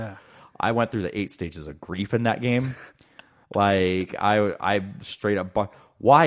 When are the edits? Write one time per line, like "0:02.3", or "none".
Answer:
none